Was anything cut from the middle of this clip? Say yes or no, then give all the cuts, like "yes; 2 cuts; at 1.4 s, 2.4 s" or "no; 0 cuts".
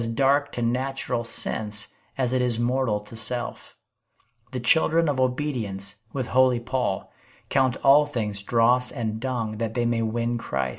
no; 0 cuts